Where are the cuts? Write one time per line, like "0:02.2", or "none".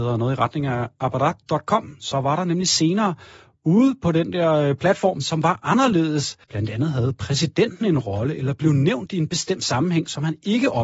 0:06.4

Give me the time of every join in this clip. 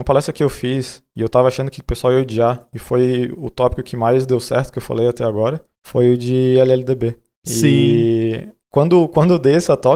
none

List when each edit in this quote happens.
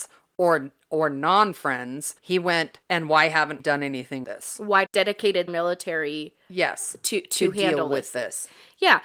0:02.2
0:02.8
0:03.6
0:04.2
0:04.9
0:05.5

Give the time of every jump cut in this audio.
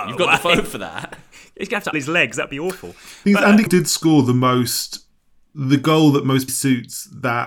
0:01.9
0:03.7
0:06.5

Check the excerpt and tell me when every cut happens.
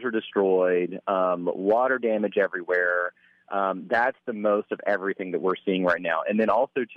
none

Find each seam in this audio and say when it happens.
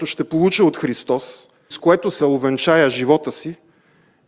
0:01.7
0:02.2

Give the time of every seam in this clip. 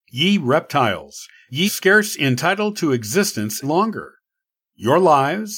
0:01.7
0:03.6

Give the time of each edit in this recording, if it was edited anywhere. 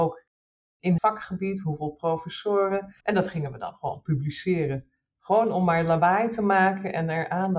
0:01.0
0:03.0

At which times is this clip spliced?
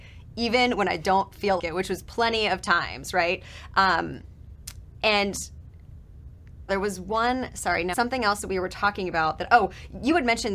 0:01.6
0:06.7
0:07.9

